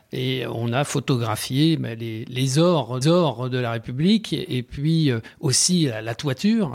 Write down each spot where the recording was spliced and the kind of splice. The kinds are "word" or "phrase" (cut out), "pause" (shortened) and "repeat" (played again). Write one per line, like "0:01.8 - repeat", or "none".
0:03.0 - repeat